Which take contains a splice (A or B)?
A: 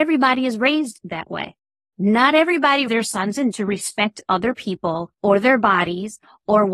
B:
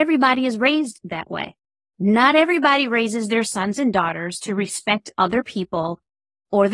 A